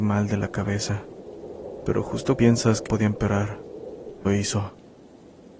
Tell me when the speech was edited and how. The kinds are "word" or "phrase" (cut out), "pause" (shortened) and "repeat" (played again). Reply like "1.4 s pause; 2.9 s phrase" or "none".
2.3 s word; 2.9 s word; 4.2 s word